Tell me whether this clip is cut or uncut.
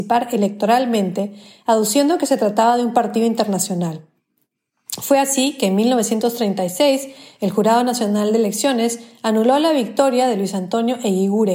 uncut